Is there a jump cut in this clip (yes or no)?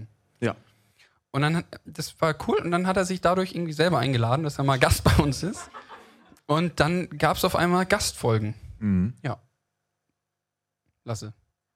no